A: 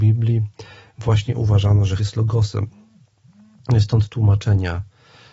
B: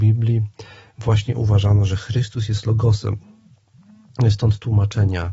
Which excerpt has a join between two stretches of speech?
A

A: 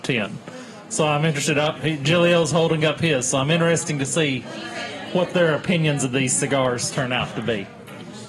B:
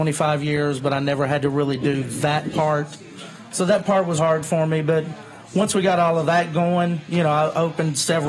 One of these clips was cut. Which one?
B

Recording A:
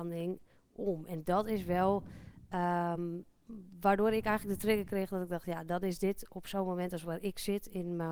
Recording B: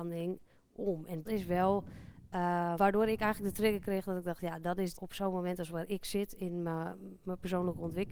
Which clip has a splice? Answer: B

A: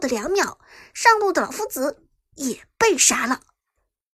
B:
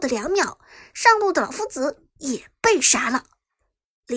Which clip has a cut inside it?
B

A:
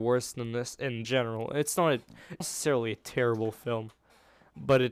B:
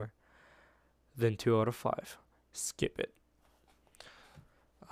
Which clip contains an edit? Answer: A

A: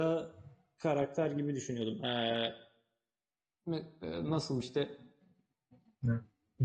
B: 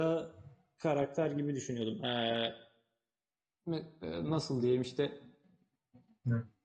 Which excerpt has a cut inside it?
A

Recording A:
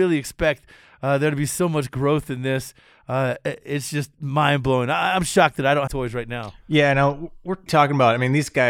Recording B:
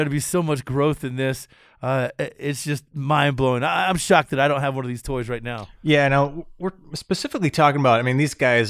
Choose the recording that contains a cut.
A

